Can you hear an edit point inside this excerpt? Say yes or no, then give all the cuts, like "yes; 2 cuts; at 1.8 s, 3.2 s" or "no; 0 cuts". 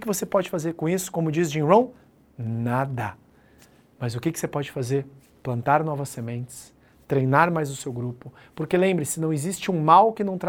no; 0 cuts